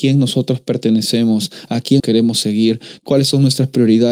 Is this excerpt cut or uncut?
cut